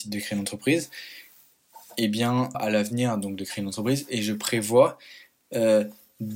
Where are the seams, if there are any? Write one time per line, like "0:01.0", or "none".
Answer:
0:02.5